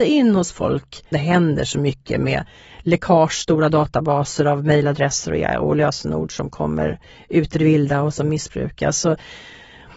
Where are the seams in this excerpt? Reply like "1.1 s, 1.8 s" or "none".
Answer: 1.1 s